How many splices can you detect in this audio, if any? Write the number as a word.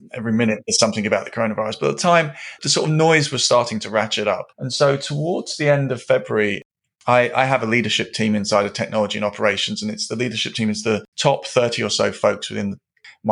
two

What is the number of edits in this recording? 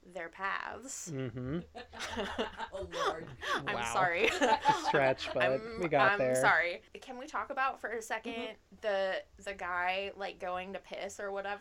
one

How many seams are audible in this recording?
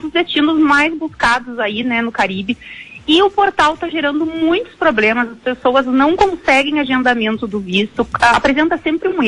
zero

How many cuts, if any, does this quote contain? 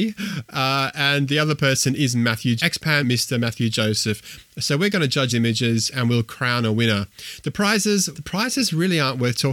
four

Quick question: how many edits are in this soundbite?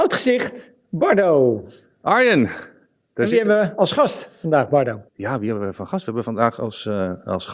one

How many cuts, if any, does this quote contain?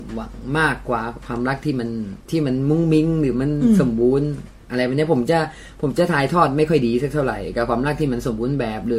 one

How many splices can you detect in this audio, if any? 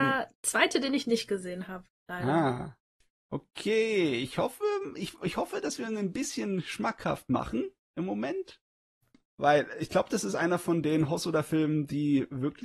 zero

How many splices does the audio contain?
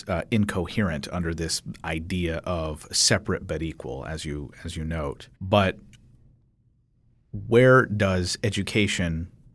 one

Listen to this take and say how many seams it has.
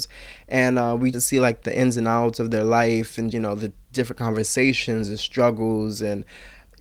two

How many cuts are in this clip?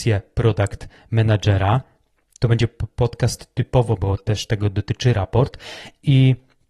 one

